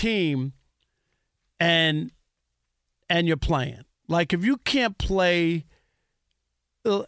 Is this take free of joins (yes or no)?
yes